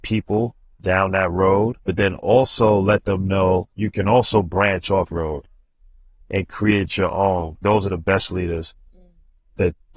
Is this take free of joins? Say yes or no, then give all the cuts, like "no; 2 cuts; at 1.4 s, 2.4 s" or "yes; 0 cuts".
no; 4 cuts; at 1.8 s, 3.7 s, 5.1 s, 7.6 s